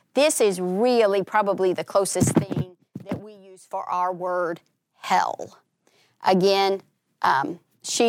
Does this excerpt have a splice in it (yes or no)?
no